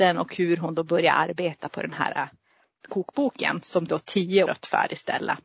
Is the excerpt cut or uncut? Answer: cut